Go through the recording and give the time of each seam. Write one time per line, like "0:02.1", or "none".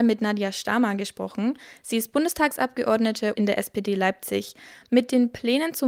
0:03.4